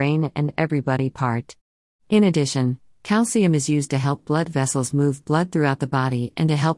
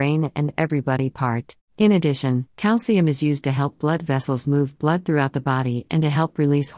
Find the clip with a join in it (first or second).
second